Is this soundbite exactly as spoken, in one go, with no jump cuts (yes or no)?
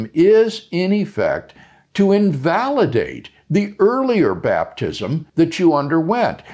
no